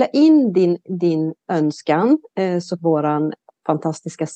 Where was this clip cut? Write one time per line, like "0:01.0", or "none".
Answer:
0:02.8